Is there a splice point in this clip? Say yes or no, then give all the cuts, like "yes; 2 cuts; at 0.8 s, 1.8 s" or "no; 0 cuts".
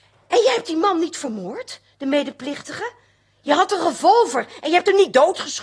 no; 0 cuts